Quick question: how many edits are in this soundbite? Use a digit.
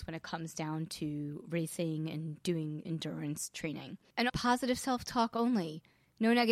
2